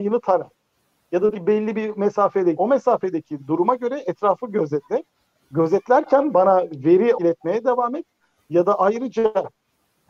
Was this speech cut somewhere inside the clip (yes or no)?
yes